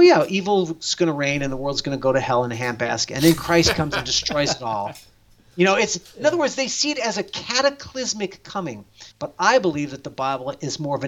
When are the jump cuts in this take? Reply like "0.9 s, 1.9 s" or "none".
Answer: 9.1 s